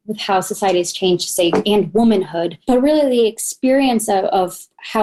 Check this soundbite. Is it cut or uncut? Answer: uncut